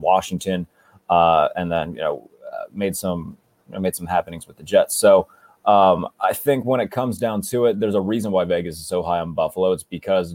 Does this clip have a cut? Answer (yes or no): no